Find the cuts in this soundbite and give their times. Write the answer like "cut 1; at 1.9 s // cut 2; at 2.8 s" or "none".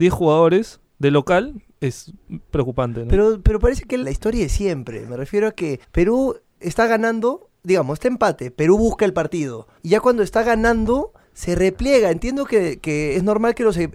cut 1; at 4.0 s // cut 2; at 5.8 s // cut 3; at 9.8 s // cut 4; at 11.2 s